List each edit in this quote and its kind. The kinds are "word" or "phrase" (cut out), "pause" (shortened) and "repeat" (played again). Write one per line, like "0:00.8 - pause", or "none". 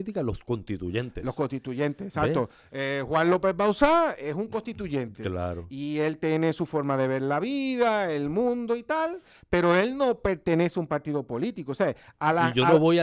none